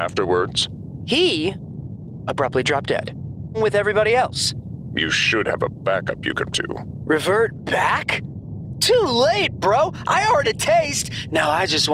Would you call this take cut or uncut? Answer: cut